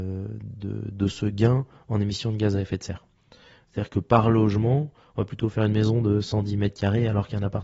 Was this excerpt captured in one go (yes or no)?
yes